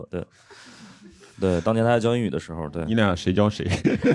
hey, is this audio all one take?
yes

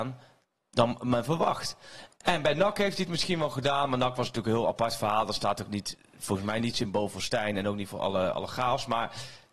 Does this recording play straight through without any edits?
yes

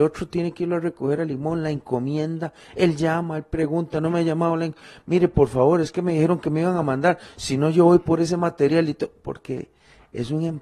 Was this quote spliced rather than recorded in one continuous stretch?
no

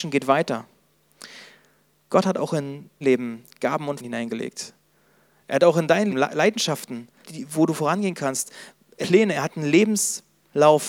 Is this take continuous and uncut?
no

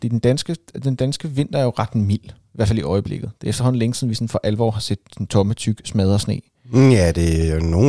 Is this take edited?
no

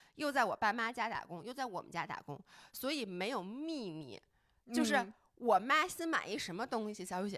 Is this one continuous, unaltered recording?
yes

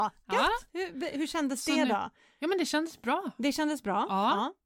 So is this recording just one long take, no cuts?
yes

